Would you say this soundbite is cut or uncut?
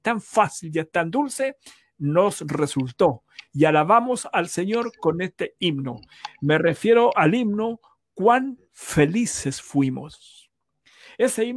uncut